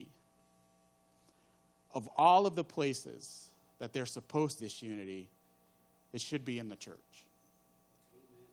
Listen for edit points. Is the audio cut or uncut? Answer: cut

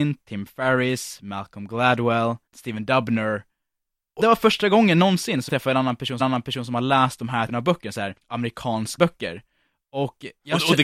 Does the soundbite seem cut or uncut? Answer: cut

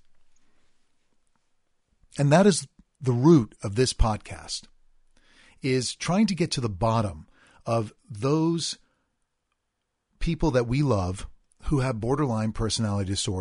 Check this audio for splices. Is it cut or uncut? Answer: uncut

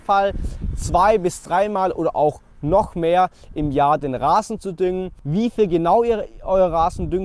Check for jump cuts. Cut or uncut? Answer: uncut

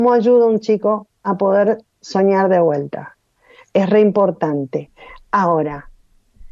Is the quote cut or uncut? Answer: uncut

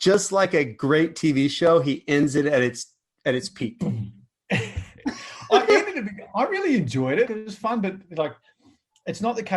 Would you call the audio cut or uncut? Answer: cut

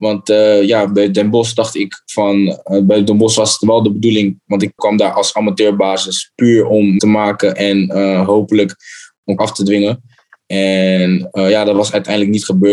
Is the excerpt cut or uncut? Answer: cut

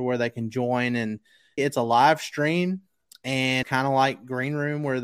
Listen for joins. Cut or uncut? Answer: cut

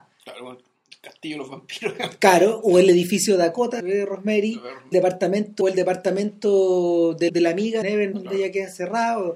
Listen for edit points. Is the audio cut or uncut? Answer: cut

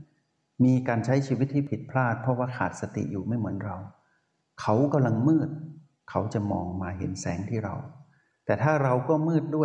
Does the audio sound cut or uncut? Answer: uncut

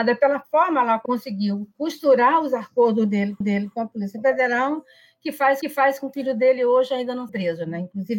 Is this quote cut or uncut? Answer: cut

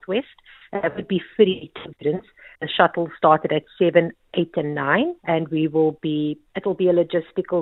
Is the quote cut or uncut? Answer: cut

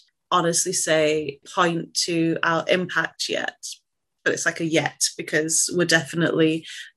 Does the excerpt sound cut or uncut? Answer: uncut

